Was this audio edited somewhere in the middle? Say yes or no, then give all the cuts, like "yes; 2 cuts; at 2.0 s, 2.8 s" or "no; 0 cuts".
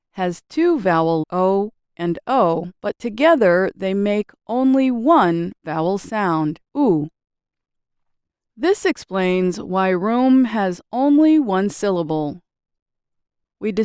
yes; 3 cuts; at 1.2 s, 2.7 s, 6.6 s